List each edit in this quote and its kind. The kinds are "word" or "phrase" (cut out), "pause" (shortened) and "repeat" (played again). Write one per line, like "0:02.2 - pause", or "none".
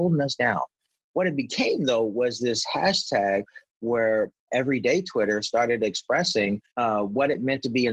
0:04.5 - word
0:06.7 - pause